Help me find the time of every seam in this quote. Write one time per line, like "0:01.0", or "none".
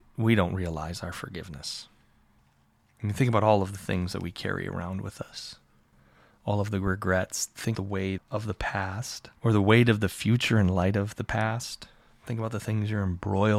0:07.7
0:08.2
0:09.4